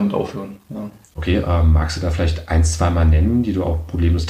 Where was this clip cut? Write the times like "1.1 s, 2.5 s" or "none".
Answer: 1.0 s